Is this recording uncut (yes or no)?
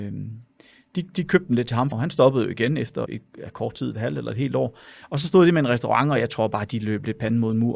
no